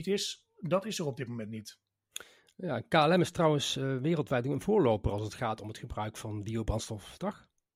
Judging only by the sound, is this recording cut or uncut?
uncut